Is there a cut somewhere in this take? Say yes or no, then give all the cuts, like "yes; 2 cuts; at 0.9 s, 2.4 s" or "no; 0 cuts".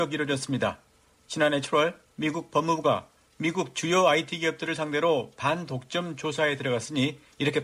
no; 0 cuts